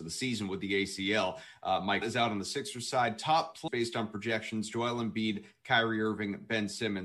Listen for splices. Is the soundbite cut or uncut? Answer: cut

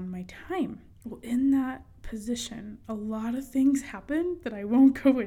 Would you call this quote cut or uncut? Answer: cut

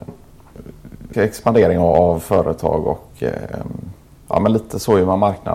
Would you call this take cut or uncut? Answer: cut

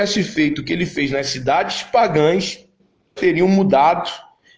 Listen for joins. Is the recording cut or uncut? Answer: cut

